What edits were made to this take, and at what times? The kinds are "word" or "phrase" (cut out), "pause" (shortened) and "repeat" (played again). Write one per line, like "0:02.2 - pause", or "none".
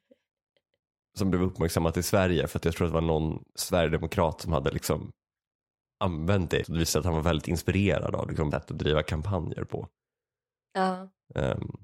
0:03.5 - pause
0:06.6 - word
0:08.5 - word